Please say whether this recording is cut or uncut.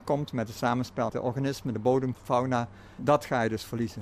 cut